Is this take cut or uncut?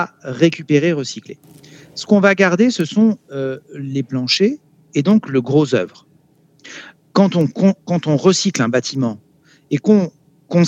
uncut